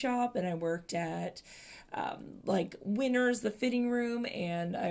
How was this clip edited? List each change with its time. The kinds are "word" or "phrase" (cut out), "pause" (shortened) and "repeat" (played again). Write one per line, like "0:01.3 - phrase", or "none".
none